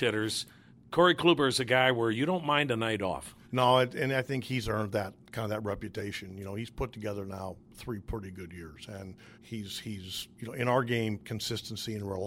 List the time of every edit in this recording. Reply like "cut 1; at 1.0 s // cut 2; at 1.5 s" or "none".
cut 1; at 3.4 s // cut 2; at 9.3 s